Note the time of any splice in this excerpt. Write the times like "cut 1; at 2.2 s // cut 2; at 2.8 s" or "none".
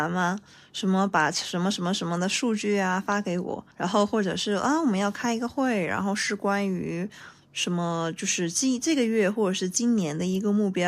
cut 1; at 3.7 s